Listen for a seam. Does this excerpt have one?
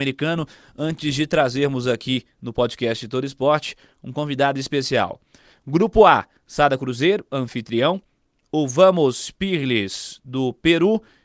no; 0 cuts

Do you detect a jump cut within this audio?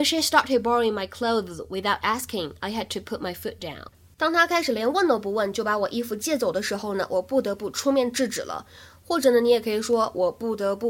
no; 0 cuts

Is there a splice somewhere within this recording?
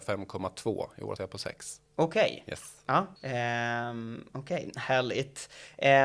yes; 3 cuts; at 1.2 s, 1.9 s, 3.2 s

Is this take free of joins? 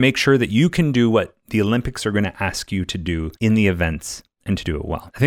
yes; 0 cuts

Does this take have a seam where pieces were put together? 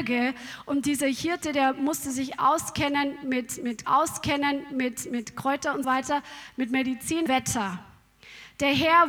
yes; 3 cuts; at 3.8 s, 5.8 s, 7.3 s

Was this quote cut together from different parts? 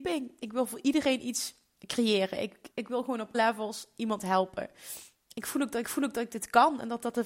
yes; 3 cuts; at 2.7 s, 3.3 s, 5.8 s

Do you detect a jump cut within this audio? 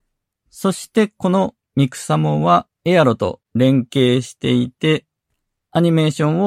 yes; 2 cuts; at 2.7 s, 3.4 s

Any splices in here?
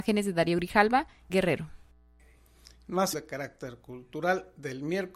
yes; 2 cuts; at 1.3 s, 3.1 s

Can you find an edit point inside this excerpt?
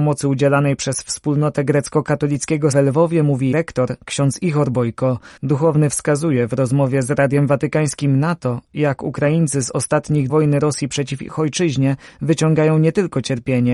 yes; 4 cuts; at 2.7 s, 3.5 s, 5.4 s, 10.3 s

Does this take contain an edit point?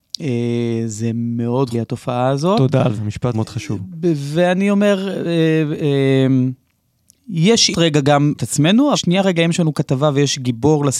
yes; 6 cuts; at 1.7 s, 3.0 s, 3.3 s, 7.7 s, 8.3 s, 8.9 s

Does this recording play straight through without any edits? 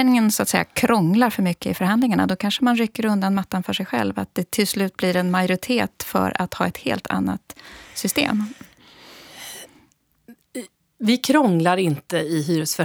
yes; 0 cuts

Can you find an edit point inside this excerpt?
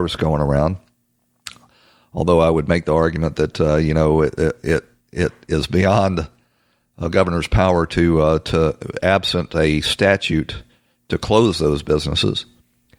no; 0 cuts

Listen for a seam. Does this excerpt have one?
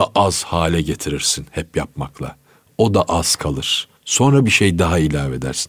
yes; 1 cut; at 4.0 s

